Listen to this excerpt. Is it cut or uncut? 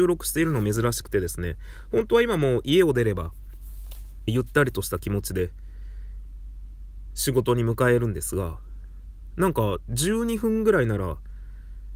cut